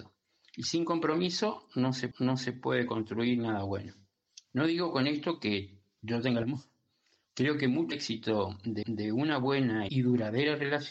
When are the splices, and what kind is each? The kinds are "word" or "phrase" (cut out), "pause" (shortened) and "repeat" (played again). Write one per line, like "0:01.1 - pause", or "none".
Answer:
0:02.1 - repeat
0:04.4 - pause
0:06.4 - phrase
0:07.9 - word
0:08.8 - repeat
0:09.9 - word